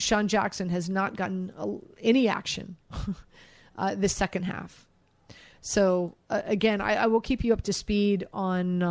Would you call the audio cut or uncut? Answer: uncut